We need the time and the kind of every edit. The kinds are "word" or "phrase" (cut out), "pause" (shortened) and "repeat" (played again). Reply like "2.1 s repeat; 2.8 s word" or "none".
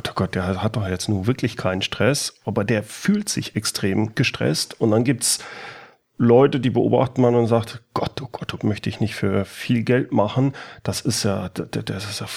8.6 s phrase